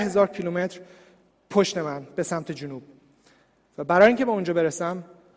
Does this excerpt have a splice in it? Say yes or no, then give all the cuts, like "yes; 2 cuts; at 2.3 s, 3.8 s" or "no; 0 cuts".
no; 0 cuts